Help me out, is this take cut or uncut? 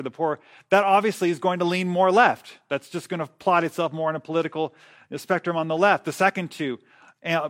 uncut